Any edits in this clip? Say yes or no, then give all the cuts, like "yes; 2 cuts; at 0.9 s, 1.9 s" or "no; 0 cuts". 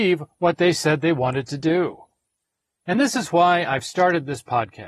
no; 0 cuts